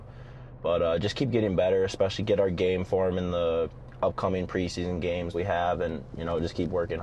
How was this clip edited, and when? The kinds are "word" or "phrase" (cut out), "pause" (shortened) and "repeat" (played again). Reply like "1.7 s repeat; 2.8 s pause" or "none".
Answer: 5.3 s word